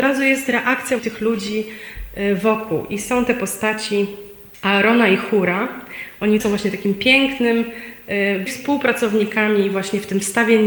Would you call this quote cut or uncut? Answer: cut